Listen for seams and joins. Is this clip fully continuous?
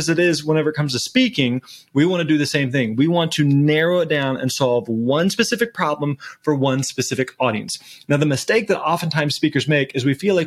yes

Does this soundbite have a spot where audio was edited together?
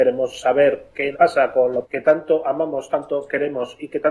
yes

